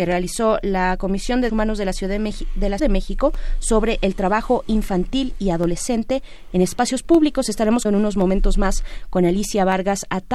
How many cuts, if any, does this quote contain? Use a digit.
3